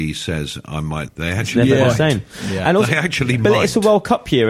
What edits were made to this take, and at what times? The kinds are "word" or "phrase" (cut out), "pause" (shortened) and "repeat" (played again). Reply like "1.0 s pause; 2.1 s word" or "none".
1.1 s phrase